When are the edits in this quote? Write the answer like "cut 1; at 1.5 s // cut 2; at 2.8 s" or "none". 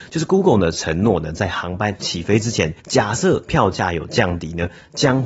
cut 1; at 2.8 s

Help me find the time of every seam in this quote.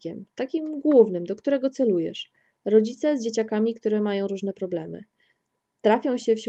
none

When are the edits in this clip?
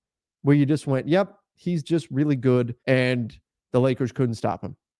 cut 1; at 2.8 s

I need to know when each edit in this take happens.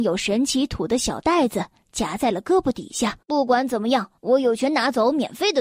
cut 1; at 3.2 s // cut 2; at 4.2 s

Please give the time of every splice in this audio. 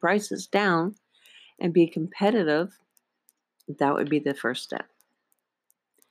none

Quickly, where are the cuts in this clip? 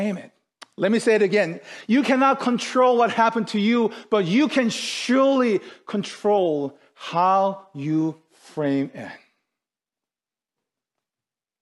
none

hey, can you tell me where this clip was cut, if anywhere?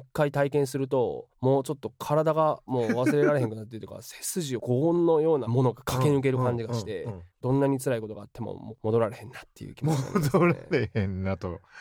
cut 1; at 1.3 s // cut 2; at 7.3 s

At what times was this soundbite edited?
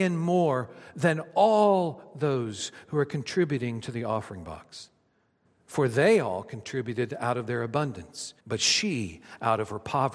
cut 1; at 8.4 s

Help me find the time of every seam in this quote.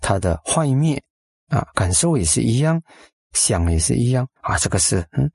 cut 1; at 4.4 s

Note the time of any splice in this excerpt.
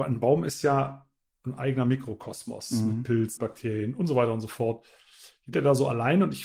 cut 1; at 3.4 s // cut 2; at 5.5 s

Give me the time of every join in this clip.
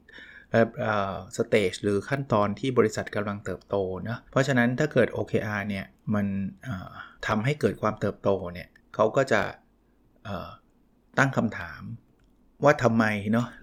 cut 1; at 4.3 s // cut 2; at 5.9 s // cut 3; at 7.2 s // cut 4; at 8.8 s

